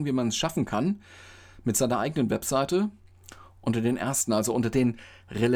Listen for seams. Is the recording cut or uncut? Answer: uncut